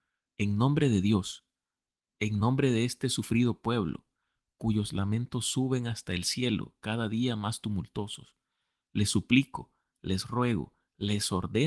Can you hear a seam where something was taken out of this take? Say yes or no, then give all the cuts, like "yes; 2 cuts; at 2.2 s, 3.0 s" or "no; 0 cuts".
no; 0 cuts